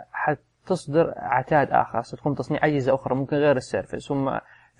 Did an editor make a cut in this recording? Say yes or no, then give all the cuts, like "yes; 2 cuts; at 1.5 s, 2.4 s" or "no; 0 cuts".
no; 0 cuts